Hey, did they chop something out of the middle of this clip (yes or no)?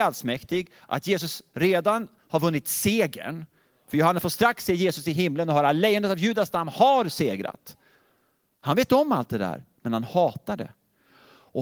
no